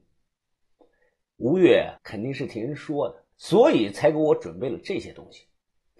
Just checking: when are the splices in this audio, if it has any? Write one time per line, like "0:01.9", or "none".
0:02.0
0:03.3

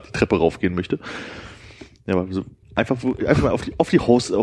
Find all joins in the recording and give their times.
0:02.6

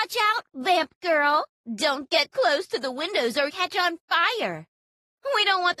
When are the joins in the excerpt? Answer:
0:01.5
0:02.3
0:03.5

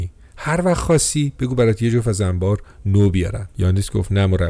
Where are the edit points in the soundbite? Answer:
none

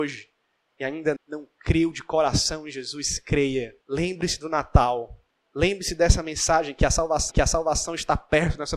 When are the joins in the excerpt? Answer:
0:01.2
0:03.8
0:07.3

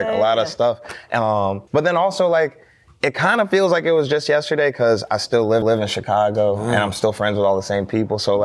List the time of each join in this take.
0:01.7
0:05.6

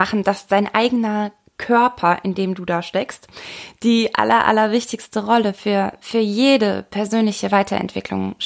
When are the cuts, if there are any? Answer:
none

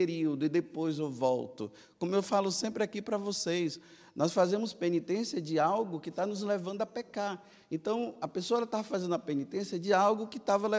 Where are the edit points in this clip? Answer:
none

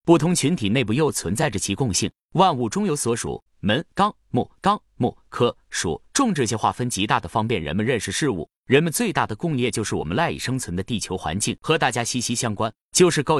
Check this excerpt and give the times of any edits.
0:03.5
0:04.6
0:11.6

